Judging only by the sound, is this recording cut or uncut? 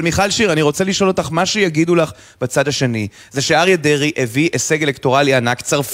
uncut